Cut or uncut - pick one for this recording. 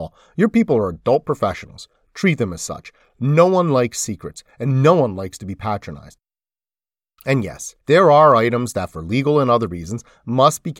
cut